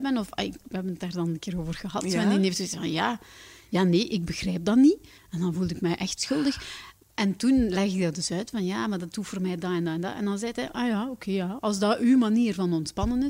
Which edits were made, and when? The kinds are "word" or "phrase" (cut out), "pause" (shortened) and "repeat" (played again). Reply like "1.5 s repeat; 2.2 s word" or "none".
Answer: none